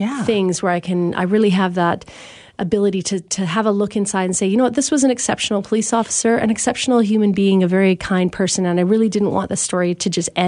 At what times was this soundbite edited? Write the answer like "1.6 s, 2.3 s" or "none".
none